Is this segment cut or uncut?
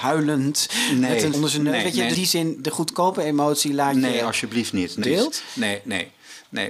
cut